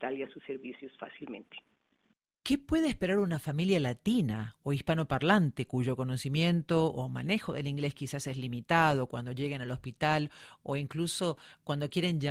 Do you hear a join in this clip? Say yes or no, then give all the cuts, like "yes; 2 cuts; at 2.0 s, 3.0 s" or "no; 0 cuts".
no; 0 cuts